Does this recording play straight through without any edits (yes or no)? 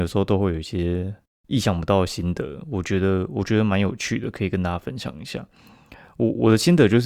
yes